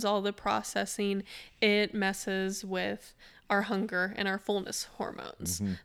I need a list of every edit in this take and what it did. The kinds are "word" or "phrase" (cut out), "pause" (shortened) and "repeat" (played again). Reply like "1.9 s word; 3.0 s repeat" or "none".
none